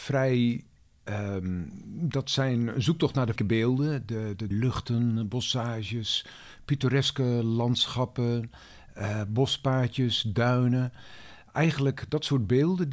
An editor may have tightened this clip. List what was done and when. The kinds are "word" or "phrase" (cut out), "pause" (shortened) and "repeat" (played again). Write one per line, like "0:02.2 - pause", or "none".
0:03.4 - word
0:04.5 - word